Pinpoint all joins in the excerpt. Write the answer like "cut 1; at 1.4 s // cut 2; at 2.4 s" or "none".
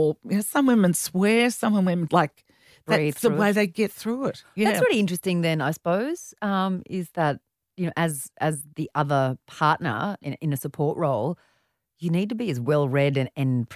cut 1; at 2.1 s